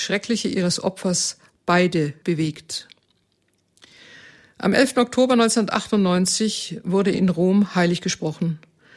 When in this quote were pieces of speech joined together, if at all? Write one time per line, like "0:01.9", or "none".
0:02.2
0:07.1